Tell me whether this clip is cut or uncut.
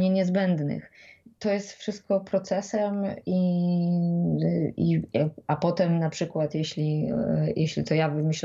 uncut